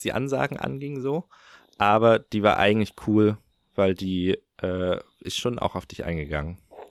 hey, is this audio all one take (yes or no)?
yes